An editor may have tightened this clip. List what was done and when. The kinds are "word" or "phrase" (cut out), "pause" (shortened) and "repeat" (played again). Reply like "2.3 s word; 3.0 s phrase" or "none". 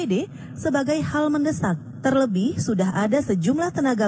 none